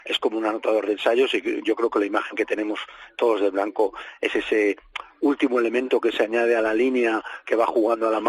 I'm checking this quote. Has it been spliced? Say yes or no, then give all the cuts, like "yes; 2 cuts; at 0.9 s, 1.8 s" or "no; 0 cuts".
no; 0 cuts